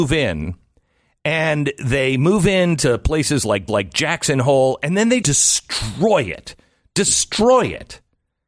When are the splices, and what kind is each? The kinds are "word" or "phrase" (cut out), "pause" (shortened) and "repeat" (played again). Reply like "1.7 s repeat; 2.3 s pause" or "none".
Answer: 3.7 s repeat; 5.2 s word